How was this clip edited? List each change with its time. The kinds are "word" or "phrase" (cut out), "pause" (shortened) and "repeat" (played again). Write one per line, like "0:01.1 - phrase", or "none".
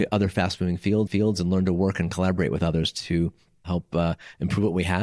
0:01.1 - repeat